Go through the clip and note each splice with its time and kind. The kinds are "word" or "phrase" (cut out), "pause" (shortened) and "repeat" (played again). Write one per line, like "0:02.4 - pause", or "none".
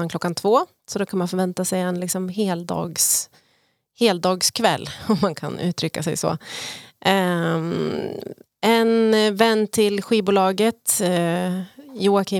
none